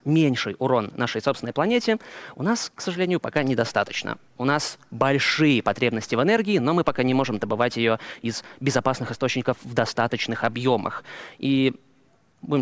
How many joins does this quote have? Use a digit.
0